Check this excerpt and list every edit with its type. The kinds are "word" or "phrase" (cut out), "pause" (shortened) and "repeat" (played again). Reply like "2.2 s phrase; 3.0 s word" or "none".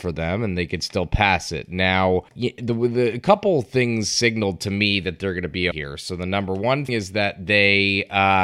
2.3 s pause; 5.7 s word; 6.9 s word